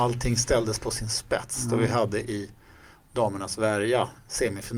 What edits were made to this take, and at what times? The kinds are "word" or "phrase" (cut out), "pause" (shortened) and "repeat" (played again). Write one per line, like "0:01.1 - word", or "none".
none

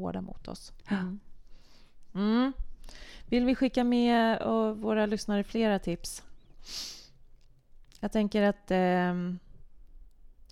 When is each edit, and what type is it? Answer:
none

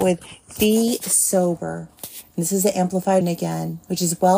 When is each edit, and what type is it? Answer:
0:03.2 - word

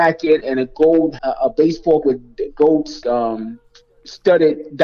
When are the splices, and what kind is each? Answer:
0:01.2 - word
0:02.0 - word
0:03.0 - word

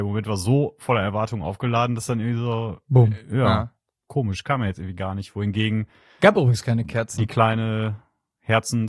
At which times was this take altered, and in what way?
none

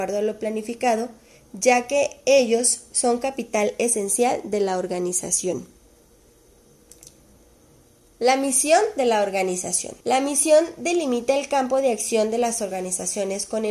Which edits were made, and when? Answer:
0:10.0 - pause

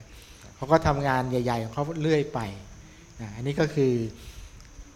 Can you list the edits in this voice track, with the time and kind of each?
none

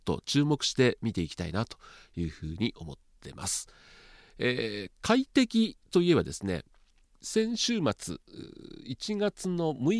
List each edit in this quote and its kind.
none

